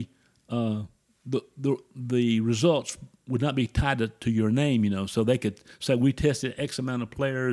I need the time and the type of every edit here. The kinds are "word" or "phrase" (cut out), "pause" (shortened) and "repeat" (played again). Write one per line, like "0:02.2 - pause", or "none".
none